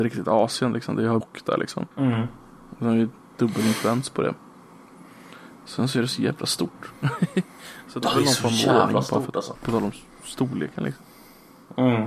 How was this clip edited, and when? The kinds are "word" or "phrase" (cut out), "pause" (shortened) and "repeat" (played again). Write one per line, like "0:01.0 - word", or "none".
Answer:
0:01.2 - word
0:01.9 - pause
0:05.5 - pause
0:08.0 - word
0:09.5 - word